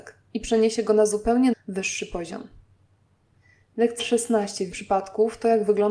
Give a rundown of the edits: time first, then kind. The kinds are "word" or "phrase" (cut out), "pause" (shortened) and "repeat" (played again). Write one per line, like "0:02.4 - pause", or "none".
0:01.5 - word
0:04.0 - word
0:04.7 - word